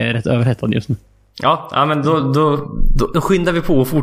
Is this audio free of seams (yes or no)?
yes